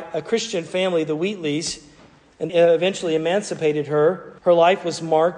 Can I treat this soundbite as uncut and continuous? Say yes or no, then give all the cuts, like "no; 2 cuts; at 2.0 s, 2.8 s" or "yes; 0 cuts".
no; 2 cuts; at 2.5 s, 4.4 s